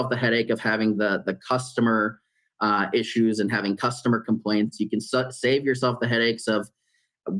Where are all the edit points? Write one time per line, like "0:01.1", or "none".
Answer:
none